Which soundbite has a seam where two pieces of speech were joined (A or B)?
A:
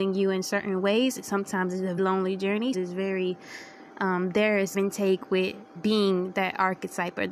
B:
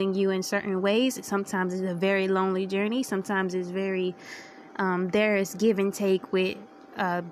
A